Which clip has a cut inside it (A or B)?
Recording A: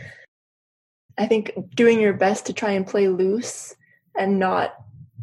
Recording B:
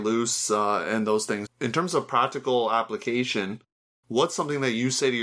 B